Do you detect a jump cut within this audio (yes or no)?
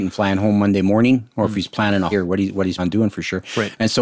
yes